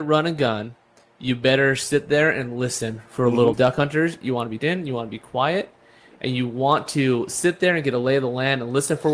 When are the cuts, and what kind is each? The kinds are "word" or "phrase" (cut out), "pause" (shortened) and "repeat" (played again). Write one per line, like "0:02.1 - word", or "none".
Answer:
0:03.5 - phrase
0:04.6 - word